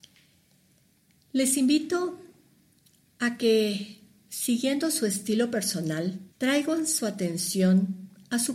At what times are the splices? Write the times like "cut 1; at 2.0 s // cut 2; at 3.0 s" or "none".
cut 1; at 6.3 s